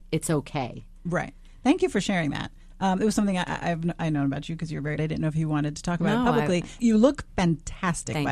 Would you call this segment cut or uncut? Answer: cut